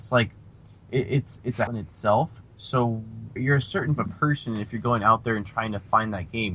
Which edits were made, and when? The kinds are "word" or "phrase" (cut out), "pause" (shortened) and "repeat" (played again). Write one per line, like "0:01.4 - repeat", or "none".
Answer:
0:01.7 - word
0:03.4 - word
0:04.0 - word